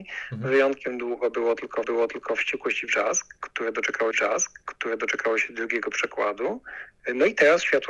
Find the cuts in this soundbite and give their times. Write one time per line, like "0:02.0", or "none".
0:01.8
0:04.1

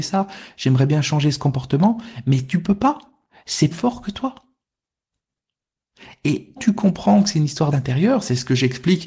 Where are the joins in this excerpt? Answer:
0:03.7
0:06.6
0:07.7

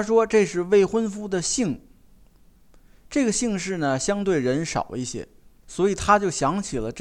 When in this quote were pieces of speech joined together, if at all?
none

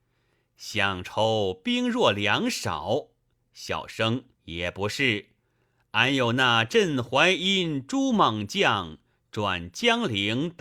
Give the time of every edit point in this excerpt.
0:04.3

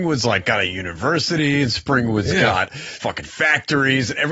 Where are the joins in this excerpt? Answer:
0:03.0

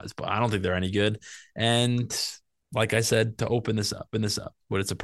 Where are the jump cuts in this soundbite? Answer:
0:02.5
0:04.1

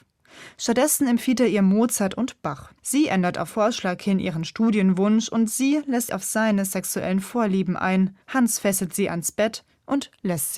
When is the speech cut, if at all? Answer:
0:02.8
0:03.5
0:06.1
0:08.2

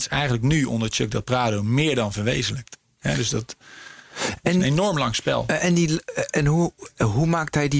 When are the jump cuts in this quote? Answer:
none

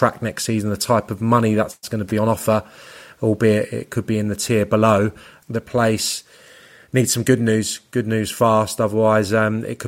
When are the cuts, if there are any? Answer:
none

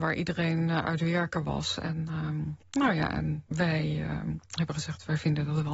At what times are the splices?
0:03.5

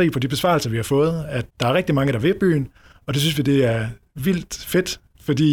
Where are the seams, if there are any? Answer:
0:01.5

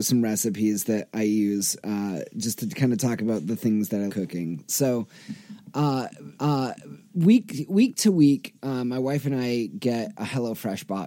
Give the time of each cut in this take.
0:04.1
0:06.4

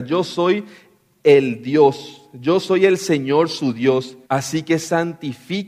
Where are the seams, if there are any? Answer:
0:04.2

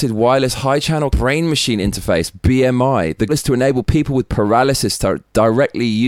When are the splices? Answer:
0:01.1
0:03.3

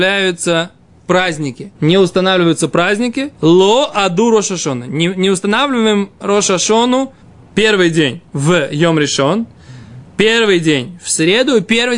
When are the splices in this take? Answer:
0:01.7
0:03.3
0:07.2
0:08.3

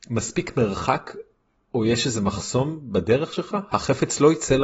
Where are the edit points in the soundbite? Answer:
none

